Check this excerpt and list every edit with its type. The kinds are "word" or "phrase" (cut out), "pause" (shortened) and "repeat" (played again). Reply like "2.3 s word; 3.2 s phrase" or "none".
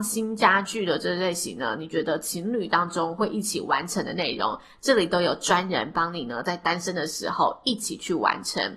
none